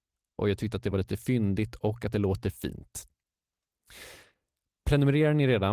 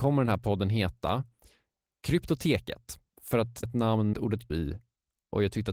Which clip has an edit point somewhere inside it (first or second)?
second